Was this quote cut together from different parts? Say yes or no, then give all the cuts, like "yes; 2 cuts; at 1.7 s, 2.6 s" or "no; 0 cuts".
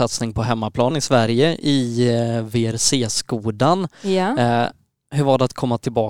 yes; 1 cut; at 0.9 s